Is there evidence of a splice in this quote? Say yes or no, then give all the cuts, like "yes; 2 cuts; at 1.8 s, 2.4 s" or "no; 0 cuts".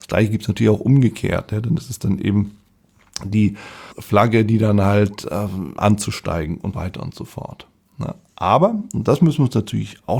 yes; 3 cuts; at 3.9 s, 5.8 s, 6.7 s